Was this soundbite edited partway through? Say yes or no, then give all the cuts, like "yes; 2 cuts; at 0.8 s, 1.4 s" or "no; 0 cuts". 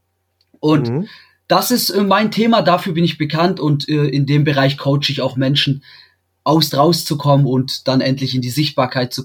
yes; 1 cut; at 6.7 s